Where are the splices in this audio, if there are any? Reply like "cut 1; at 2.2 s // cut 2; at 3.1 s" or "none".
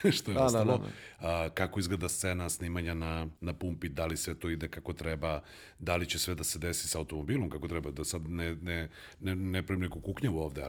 cut 1; at 3.4 s